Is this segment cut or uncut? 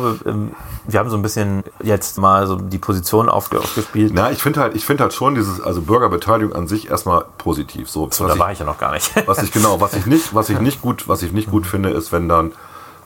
cut